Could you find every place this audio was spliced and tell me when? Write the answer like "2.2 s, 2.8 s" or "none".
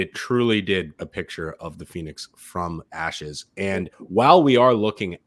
1.0 s, 2.9 s, 3.9 s